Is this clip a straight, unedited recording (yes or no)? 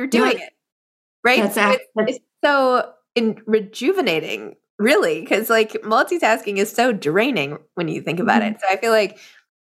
yes